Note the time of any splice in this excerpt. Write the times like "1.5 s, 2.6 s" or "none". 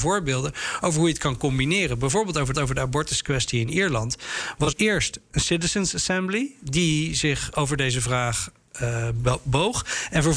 2.5 s, 4.7 s